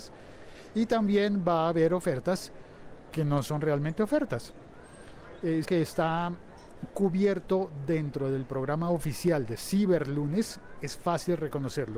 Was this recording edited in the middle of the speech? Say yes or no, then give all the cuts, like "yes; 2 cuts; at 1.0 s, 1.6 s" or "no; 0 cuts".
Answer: yes; 1 cut; at 5.6 s